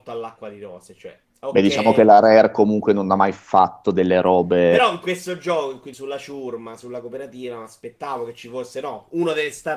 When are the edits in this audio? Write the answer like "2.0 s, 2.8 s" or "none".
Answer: 1.2 s, 5.9 s